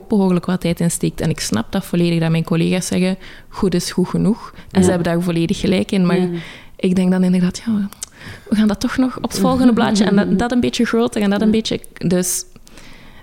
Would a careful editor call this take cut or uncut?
uncut